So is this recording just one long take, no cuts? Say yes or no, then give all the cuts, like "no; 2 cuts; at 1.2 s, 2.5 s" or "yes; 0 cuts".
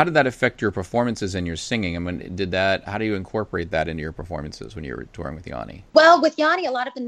no; 1 cut; at 5.9 s